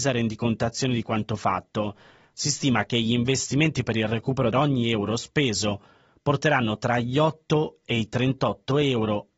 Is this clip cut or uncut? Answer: cut